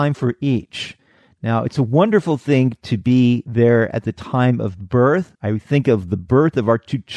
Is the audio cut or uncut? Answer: cut